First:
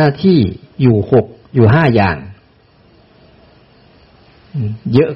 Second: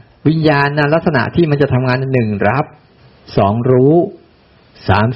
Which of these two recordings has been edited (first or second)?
second